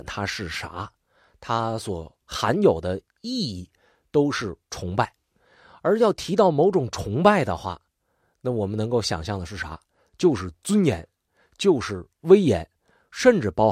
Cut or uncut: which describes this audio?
uncut